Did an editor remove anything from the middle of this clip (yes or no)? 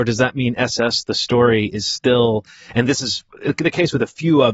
no